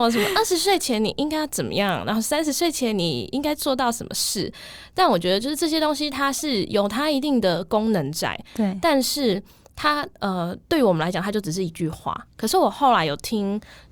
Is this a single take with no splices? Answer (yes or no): yes